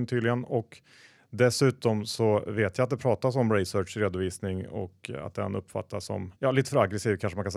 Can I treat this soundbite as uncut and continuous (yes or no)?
no